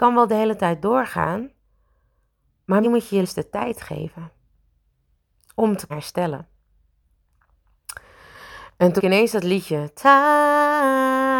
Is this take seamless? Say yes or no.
no